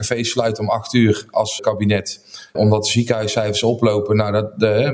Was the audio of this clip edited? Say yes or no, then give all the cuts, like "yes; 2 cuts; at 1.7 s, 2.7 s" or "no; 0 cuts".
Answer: yes; 2 cuts; at 1.6 s, 2.5 s